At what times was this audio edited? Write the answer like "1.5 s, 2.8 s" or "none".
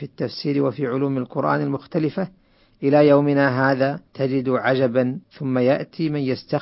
4.1 s, 5.2 s